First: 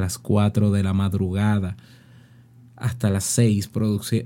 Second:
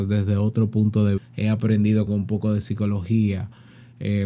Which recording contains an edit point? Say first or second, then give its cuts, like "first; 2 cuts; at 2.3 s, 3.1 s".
second; 2 cuts; at 1.2 s, 2.1 s